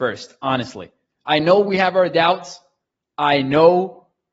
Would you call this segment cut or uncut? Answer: uncut